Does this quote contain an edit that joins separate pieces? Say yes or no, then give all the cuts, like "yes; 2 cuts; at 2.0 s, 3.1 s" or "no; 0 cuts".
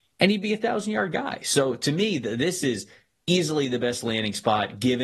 no; 0 cuts